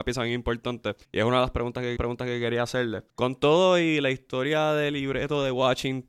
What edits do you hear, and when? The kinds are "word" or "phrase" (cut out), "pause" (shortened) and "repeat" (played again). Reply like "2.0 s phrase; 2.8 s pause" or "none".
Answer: 1.0 s pause; 2.0 s repeat; 3.1 s pause